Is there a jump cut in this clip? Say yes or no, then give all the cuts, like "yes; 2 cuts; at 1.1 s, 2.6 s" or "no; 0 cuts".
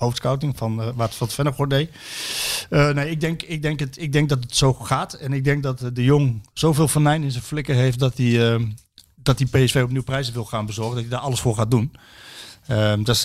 no; 0 cuts